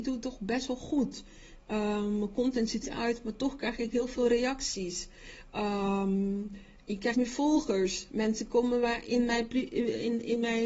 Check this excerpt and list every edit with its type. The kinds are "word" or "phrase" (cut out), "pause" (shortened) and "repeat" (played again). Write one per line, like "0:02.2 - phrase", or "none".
0:02.8 - word
0:07.1 - word